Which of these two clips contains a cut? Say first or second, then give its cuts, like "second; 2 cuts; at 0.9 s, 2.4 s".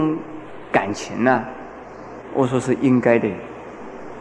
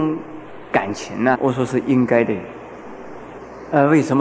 second; 1 cut; at 1.3 s